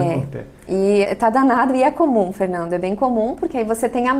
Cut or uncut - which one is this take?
cut